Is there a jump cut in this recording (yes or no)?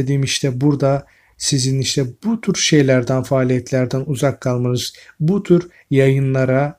no